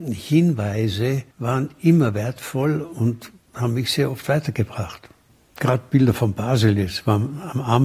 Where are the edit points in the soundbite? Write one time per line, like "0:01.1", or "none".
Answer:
0:01.3